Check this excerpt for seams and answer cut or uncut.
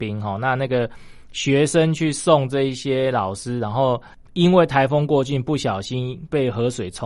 uncut